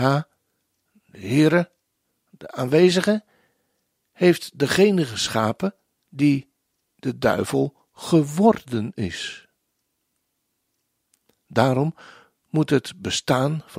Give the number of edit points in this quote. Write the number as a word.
zero